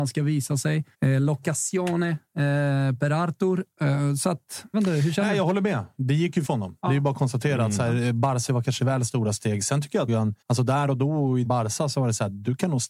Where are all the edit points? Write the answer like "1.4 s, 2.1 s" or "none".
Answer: 0.9 s, 4.7 s, 6.4 s, 6.8 s, 8.5 s, 8.8 s, 10.1 s, 10.4 s, 11.4 s